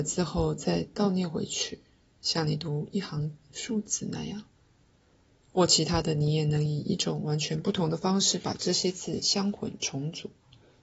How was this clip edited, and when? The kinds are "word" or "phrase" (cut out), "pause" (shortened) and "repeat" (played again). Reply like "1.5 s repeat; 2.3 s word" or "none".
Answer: none